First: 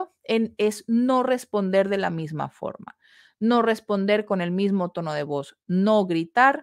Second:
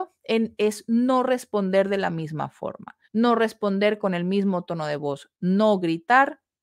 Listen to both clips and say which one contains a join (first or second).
second